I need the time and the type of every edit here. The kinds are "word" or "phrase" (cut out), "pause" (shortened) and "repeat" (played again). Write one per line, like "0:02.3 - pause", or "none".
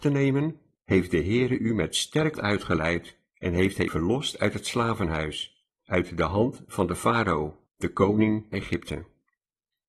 0:02.3 - word
0:03.9 - word
0:08.5 - word